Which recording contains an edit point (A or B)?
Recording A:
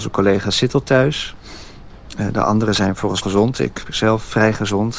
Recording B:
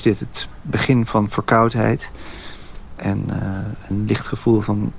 A